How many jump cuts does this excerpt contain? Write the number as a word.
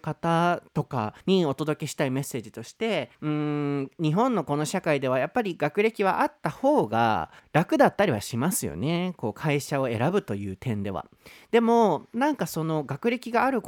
three